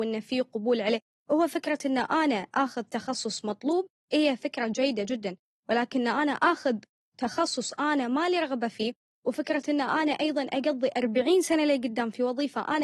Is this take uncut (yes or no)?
yes